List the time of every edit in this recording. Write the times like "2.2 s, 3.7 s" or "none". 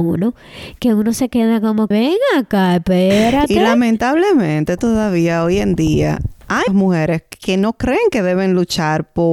1.9 s, 4.8 s, 6.7 s